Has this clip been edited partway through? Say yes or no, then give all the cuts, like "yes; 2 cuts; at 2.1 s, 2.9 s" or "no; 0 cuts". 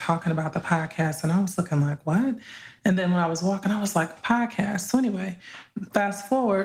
yes; 1 cut; at 4.2 s